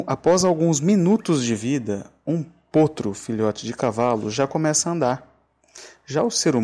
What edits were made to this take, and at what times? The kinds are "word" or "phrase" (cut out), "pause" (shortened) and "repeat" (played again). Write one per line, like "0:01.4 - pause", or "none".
none